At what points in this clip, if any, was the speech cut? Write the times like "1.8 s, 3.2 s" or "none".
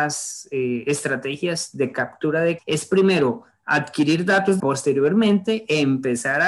2.6 s, 4.6 s